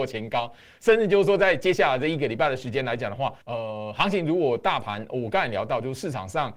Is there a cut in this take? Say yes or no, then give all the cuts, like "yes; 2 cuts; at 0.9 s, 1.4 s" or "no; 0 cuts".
yes; 1 cut; at 3.4 s